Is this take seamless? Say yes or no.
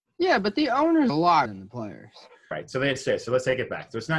no